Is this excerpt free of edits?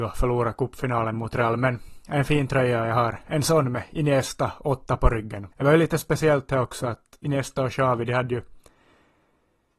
no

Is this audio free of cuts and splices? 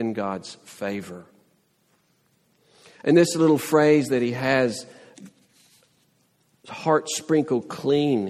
yes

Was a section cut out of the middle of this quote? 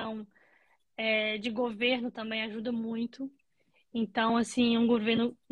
no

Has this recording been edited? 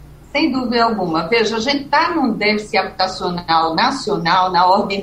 no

